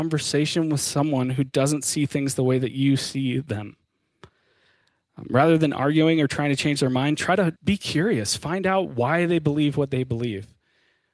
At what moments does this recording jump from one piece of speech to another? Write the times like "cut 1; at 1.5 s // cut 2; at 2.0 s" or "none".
cut 1; at 7.6 s